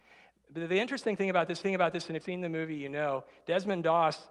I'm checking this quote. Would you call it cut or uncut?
cut